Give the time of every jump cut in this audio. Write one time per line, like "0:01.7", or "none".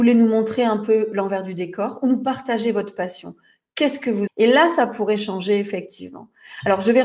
0:04.3